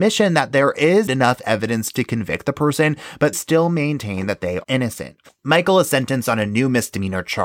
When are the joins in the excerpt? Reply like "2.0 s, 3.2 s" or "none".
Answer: 1.1 s, 3.3 s, 4.6 s